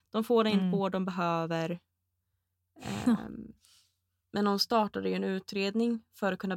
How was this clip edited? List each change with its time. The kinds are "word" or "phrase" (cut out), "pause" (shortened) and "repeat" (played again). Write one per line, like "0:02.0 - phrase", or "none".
none